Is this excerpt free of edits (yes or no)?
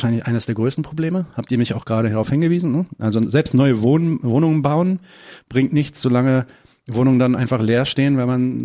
yes